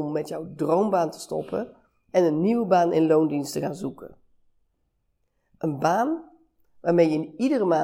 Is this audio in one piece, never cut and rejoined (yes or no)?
yes